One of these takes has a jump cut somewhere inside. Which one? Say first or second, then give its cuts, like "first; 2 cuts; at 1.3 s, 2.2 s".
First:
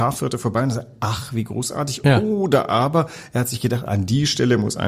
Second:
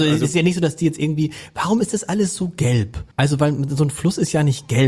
second; 1 cut; at 3.1 s